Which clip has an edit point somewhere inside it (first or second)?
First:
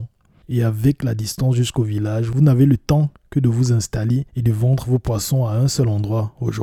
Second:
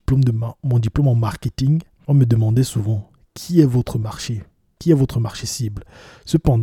first